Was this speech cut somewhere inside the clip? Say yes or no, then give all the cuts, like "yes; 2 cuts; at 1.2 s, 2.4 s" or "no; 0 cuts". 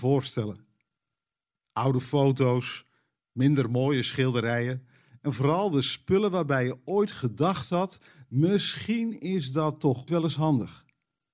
yes; 1 cut; at 10.1 s